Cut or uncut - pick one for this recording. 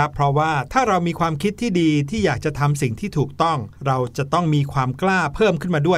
cut